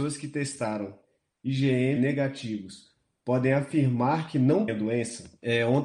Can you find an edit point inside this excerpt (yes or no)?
yes